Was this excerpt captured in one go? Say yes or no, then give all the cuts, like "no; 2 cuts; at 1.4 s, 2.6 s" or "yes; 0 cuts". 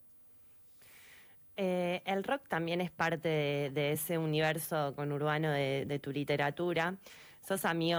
yes; 0 cuts